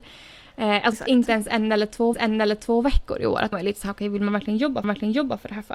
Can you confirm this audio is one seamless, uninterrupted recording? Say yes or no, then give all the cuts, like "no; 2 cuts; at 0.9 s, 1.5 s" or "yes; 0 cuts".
no; 4 cuts; at 0.9 s, 2.1 s, 3.5 s, 4.8 s